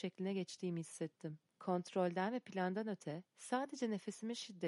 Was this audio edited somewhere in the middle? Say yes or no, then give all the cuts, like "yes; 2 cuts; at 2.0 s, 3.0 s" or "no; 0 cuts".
yes; 2 cuts; at 1.5 s, 3.3 s